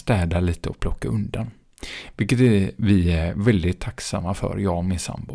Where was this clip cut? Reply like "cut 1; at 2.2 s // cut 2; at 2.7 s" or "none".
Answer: none